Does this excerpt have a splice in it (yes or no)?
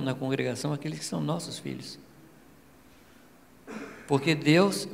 no